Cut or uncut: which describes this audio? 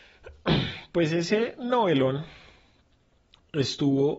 uncut